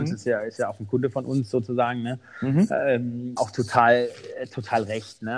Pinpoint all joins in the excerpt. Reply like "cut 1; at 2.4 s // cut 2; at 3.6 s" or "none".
cut 1; at 3.4 s